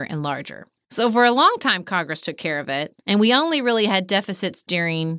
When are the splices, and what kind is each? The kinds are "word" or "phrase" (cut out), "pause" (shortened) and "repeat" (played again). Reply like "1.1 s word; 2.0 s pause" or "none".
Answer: 3.0 s pause